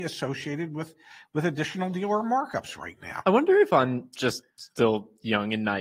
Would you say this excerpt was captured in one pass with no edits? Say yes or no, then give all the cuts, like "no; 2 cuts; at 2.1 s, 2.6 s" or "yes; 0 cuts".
no; 1 cut; at 4.5 s